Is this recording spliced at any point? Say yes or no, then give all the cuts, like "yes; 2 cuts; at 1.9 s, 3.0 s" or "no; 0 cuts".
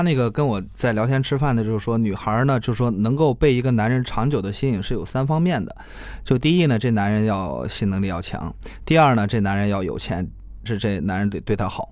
yes; 1 cut; at 10.7 s